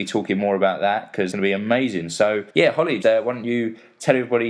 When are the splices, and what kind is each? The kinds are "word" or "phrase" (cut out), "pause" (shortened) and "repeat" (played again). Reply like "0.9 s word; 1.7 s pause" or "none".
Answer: 1.3 s word; 2.5 s pause; 3.0 s word

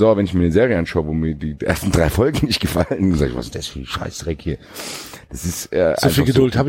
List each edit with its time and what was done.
none

